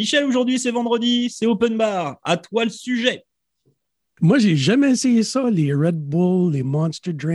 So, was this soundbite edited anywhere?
no; 0 cuts

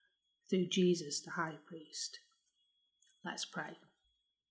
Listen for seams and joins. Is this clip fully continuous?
yes; 0 cuts

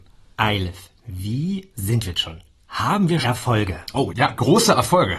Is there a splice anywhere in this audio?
yes; 4 cuts; at 1.7 s, 2.1 s, 3.2 s, 4.1 s

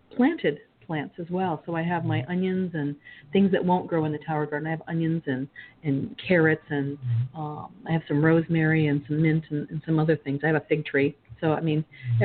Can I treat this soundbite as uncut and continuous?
yes; 0 cuts

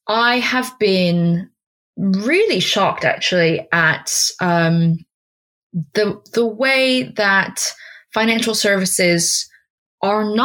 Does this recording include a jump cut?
no; 0 cuts

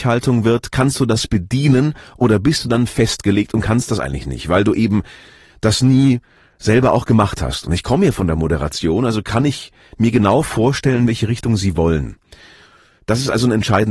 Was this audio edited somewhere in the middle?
no; 0 cuts

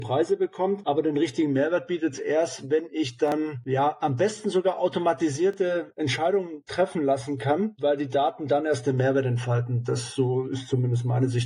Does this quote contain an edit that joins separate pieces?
no; 0 cuts

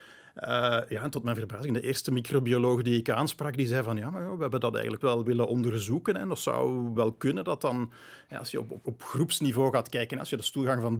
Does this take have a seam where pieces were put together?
yes; 3 cuts; at 5.0 s, 7.0 s, 8.8 s

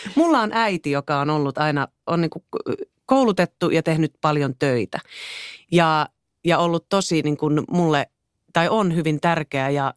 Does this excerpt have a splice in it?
no; 0 cuts

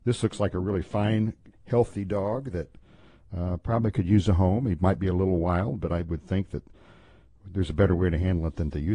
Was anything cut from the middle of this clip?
no; 0 cuts

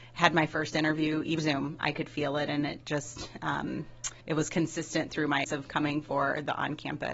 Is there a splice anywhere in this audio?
yes; 3 cuts; at 1.4 s, 4.2 s, 5.4 s

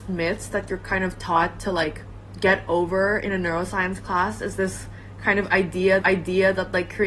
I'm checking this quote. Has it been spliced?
yes; 1 cut; at 6.0 s

